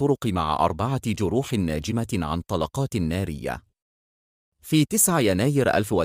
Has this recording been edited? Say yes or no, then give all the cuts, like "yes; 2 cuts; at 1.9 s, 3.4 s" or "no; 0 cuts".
no; 0 cuts